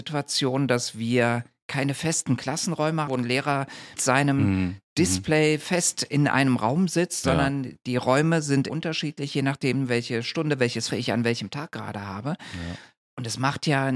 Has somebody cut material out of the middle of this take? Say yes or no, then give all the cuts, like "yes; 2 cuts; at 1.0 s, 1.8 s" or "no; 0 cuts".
yes; 4 cuts; at 3.1 s, 4.0 s, 8.7 s, 10.9 s